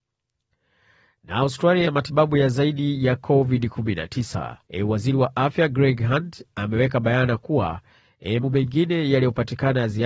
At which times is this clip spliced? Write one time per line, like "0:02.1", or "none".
0:01.8
0:04.6
0:08.4